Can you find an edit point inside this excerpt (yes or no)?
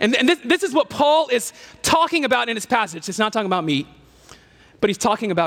no